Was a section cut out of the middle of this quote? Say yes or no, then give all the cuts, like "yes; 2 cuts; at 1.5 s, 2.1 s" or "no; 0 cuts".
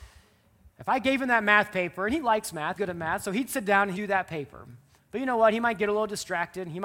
yes; 2 cuts; at 2.7 s, 3.9 s